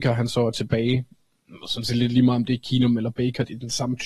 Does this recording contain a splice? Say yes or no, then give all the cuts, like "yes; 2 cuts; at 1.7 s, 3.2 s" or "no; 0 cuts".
no; 0 cuts